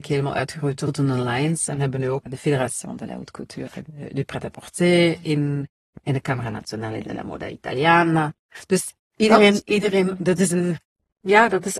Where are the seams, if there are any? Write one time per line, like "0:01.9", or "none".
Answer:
none